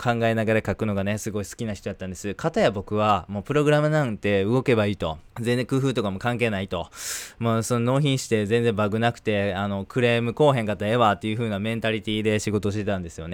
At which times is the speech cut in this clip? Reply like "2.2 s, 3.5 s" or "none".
5.3 s